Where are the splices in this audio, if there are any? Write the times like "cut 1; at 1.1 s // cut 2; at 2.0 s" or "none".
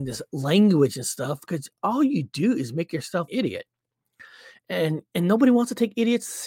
cut 1; at 3.3 s // cut 2; at 5.1 s